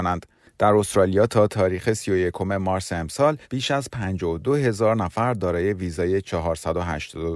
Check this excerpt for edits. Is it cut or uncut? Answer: cut